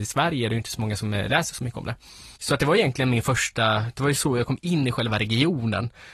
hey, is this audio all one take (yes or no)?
no